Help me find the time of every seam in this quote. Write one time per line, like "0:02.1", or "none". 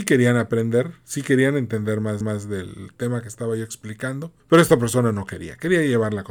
0:02.2
0:04.4